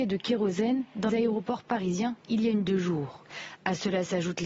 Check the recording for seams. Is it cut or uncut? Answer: cut